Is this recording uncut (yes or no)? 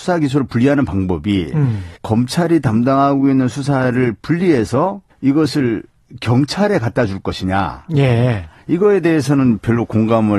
no